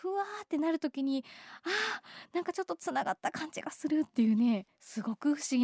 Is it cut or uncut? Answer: cut